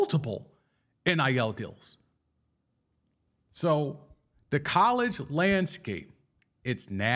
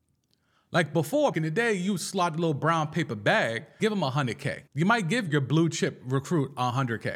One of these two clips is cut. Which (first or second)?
second